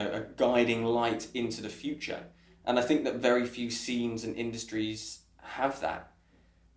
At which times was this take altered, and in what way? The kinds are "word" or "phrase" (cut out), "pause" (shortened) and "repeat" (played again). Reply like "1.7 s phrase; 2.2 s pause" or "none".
none

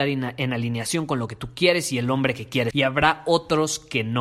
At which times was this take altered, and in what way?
2.7 s word

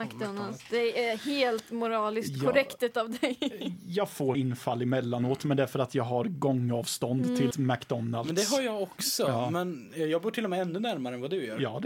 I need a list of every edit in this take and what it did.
4.3 s word; 7.5 s word

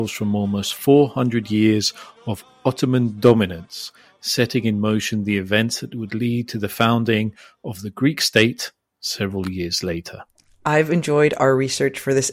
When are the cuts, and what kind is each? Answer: none

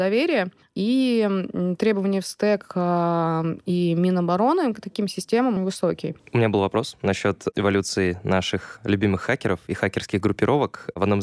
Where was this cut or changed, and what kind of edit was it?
5.6 s word

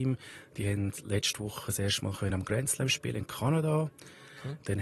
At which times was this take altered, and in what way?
none

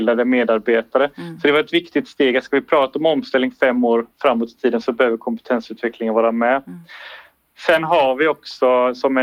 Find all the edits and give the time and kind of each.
none

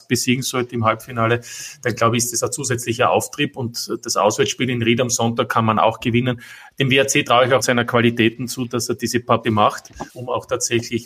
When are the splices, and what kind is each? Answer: 7.6 s word; 9.4 s word; 10.1 s pause

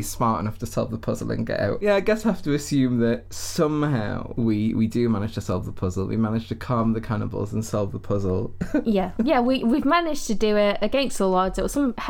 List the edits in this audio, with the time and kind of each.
2.2 s phrase

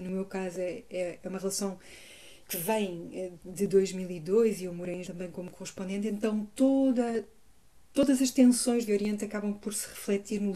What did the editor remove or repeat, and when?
2.4 s pause; 5.0 s word; 8.9 s phrase

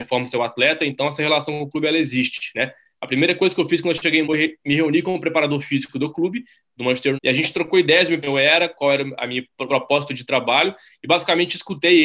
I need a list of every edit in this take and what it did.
4.2 s word; 7.1 s word; 8.2 s phrase; 9.7 s word

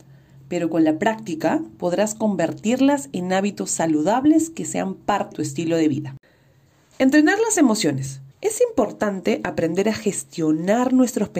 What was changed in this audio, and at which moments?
5.3 s word; 8.3 s pause

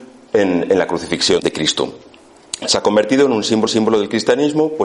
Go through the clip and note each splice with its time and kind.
1.4 s word; 3.7 s repeat

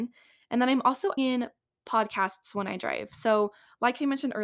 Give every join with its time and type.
1.2 s word

